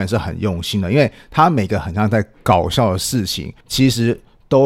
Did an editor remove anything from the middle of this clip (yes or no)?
yes